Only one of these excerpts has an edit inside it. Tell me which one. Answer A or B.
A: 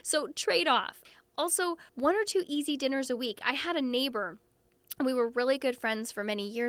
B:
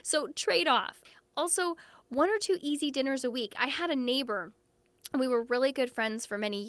A